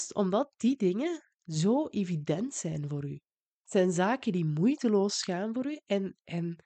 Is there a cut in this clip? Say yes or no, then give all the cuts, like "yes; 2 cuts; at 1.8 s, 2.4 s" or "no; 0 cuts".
no; 0 cuts